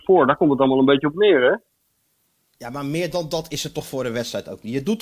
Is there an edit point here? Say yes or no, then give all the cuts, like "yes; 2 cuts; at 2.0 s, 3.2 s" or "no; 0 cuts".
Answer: no; 0 cuts